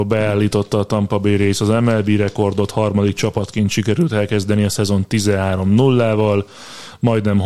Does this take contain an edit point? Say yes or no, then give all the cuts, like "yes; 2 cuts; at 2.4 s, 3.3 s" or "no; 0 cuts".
no; 0 cuts